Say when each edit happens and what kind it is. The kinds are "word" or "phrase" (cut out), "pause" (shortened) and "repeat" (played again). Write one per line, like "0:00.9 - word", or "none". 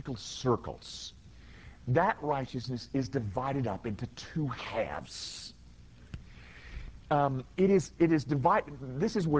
none